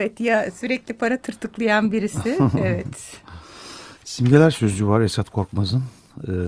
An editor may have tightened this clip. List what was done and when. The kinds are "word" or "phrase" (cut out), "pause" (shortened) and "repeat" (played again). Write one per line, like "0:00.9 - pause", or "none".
0:04.0 - pause